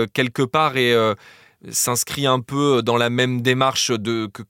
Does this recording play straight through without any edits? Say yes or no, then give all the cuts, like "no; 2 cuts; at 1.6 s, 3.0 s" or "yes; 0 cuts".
yes; 0 cuts